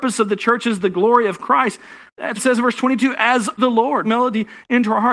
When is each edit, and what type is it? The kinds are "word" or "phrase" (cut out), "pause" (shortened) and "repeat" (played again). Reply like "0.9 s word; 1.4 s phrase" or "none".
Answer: 2.4 s word; 3.6 s word; 4.0 s word